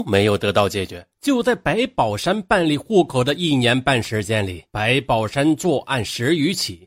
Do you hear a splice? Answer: yes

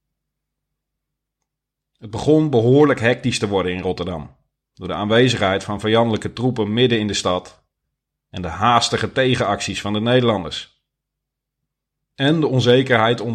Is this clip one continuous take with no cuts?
yes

